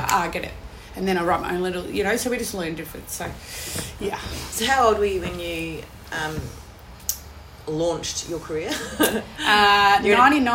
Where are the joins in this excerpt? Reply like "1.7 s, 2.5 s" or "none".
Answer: none